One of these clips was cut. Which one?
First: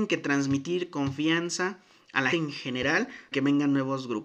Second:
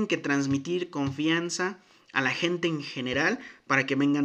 first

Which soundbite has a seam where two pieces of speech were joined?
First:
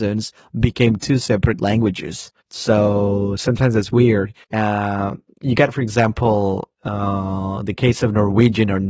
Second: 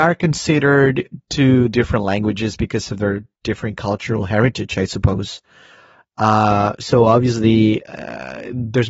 first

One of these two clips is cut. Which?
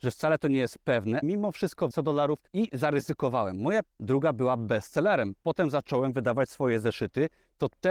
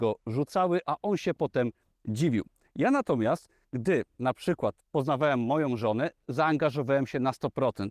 first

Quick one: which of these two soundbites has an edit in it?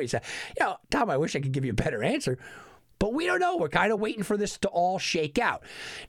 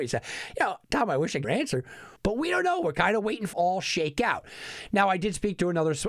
second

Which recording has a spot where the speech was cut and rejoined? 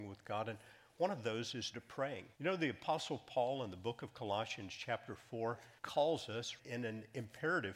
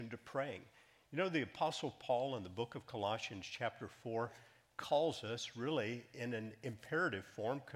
first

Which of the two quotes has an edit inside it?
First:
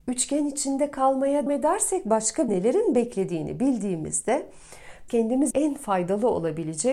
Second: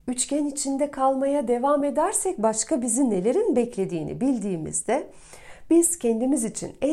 first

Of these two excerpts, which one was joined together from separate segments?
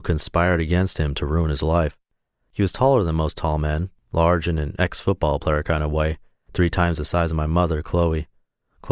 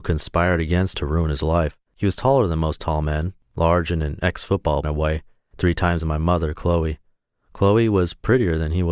second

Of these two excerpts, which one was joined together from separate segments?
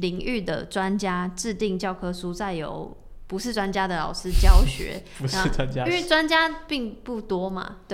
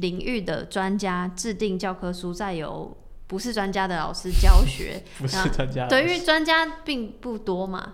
first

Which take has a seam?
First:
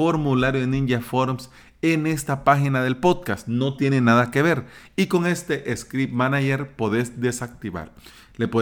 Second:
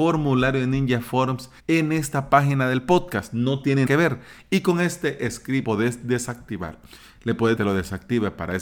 second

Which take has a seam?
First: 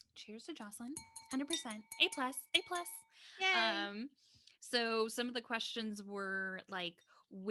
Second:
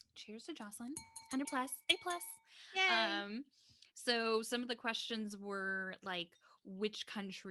second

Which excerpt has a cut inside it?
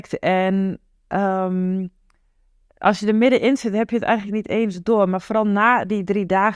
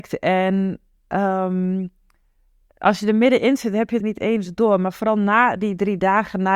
second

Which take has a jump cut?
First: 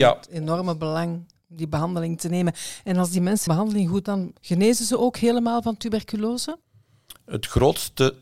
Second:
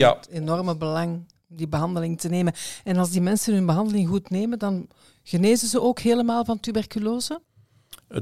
first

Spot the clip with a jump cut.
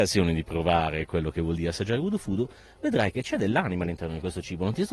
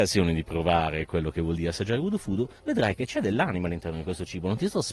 second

